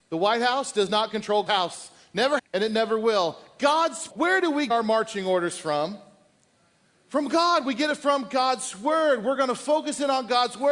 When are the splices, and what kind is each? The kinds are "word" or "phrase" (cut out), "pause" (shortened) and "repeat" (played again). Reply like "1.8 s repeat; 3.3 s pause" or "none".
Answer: 1.5 s word; 2.4 s word; 4.1 s word; 4.7 s word